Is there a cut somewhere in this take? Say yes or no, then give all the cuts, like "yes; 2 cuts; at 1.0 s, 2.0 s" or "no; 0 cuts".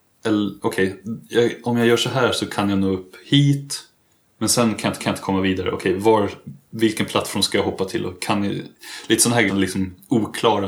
yes; 2 cuts; at 5.0 s, 9.5 s